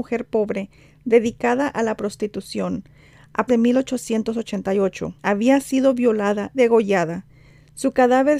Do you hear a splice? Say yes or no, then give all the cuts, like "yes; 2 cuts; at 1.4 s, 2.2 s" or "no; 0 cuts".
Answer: yes; 3 cuts; at 3.5 s, 5.2 s, 6.5 s